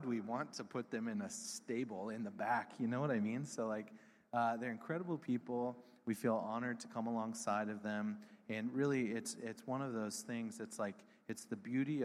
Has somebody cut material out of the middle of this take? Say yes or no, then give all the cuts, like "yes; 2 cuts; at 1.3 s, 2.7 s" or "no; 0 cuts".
no; 0 cuts